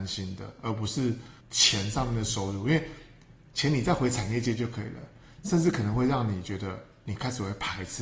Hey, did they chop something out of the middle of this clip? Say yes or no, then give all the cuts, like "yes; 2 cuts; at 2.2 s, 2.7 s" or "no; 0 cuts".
yes; 1 cut; at 1.4 s